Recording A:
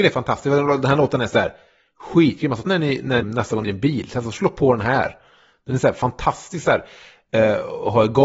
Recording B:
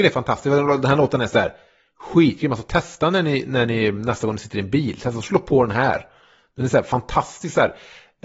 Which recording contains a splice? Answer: A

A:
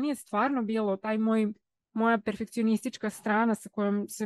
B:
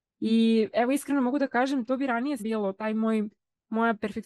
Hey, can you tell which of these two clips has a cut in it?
B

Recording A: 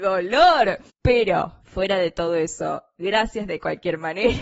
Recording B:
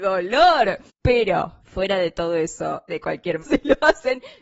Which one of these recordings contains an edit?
B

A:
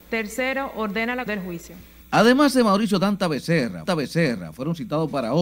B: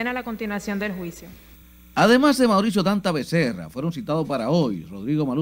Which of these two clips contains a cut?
A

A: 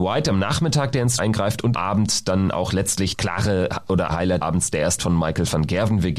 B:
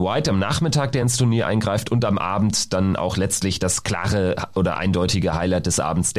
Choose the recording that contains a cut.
A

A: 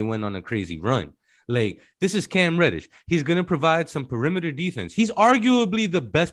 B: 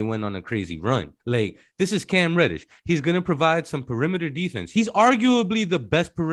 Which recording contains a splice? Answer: B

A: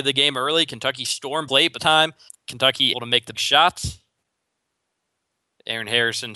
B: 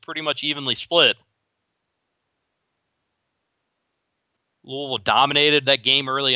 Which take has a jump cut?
A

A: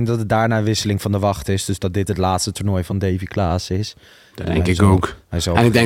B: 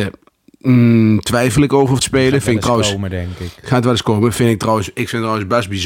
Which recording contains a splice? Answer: B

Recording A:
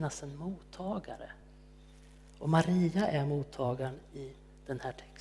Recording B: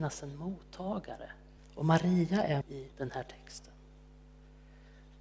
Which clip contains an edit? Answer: B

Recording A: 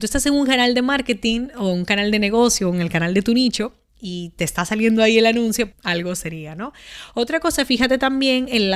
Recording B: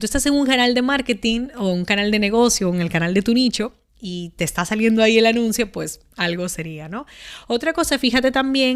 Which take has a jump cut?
A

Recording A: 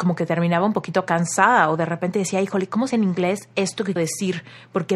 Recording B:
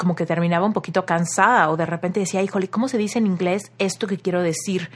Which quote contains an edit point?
A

